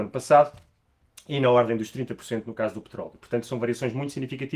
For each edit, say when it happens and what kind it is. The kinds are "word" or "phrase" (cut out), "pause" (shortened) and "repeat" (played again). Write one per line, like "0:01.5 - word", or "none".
none